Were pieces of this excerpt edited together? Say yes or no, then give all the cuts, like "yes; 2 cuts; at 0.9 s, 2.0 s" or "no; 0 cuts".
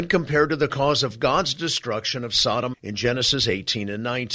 yes; 1 cut; at 2.7 s